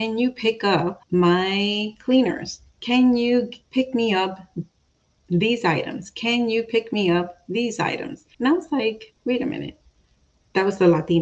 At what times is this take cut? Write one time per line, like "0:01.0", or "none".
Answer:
0:01.0
0:03.6
0:08.3
0:09.2